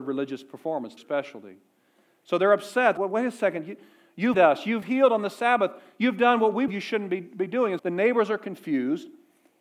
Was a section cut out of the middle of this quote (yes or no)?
yes